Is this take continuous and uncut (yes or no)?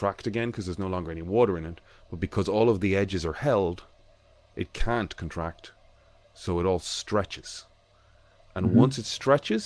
yes